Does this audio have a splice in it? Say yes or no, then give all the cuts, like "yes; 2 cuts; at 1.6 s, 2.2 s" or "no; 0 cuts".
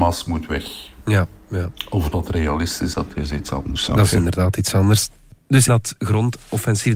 yes; 3 cuts; at 2.1 s, 2.9 s, 5.7 s